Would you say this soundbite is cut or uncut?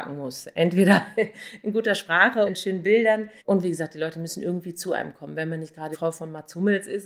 cut